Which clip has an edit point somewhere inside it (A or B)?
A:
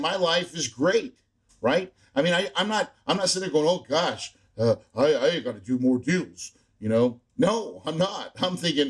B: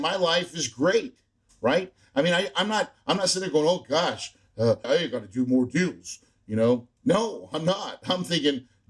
B